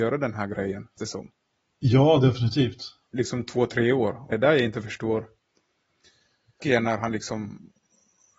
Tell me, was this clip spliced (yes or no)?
yes